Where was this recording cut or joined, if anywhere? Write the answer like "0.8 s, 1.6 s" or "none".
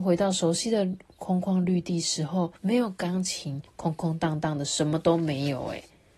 2.6 s, 3.7 s

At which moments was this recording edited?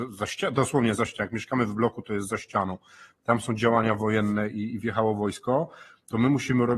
none

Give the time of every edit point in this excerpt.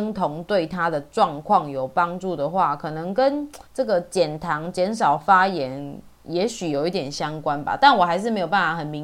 3.7 s

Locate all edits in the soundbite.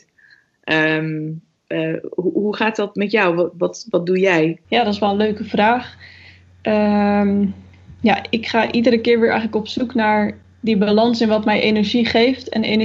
4.6 s

